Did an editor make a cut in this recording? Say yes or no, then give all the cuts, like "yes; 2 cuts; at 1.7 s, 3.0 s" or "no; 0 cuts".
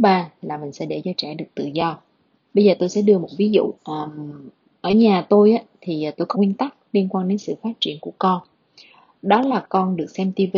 yes; 3 cuts; at 2.3 s, 3.8 s, 6.3 s